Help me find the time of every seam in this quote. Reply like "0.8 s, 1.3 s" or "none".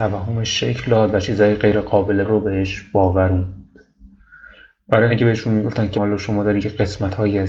2.2 s, 5.1 s, 5.9 s